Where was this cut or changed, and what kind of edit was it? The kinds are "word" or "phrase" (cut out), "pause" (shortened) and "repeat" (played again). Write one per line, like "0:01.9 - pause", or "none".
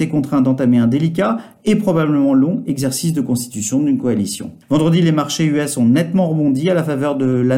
0:04.6 - pause